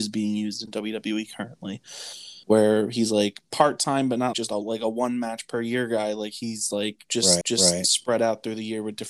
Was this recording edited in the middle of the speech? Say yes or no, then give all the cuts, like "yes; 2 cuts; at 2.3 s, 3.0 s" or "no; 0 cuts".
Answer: yes; 3 cuts; at 2.4 s, 4.3 s, 7.4 s